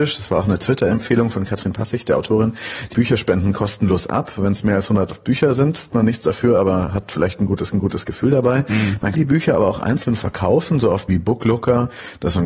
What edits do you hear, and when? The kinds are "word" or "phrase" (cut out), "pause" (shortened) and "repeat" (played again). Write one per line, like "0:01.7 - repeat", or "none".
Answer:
0:02.9 - phrase
0:05.9 - word
0:07.7 - repeat
0:09.1 - word
0:11.1 - word